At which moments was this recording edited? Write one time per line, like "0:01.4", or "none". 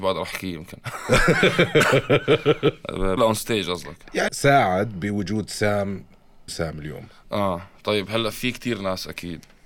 0:03.2
0:04.3
0:06.5
0:07.1
0:08.3